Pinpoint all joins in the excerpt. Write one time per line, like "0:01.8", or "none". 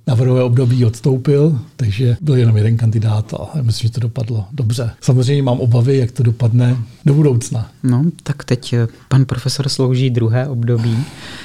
0:04.9